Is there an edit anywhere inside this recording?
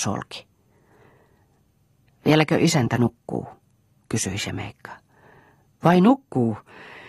no; 0 cuts

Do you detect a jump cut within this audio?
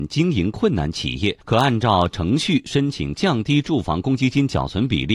yes; 1 cut; at 1.4 s

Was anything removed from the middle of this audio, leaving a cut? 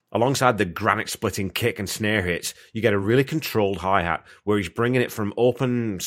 no; 0 cuts

